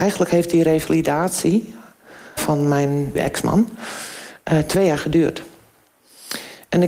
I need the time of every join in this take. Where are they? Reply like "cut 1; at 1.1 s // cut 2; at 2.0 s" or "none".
cut 1; at 2.4 s // cut 2; at 3.1 s